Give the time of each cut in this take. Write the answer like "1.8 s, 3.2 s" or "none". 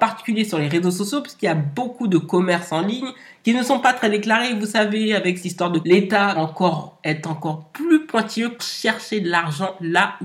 5.4 s, 5.8 s, 6.3 s, 8.6 s